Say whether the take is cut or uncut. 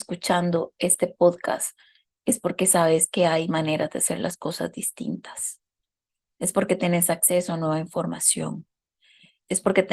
uncut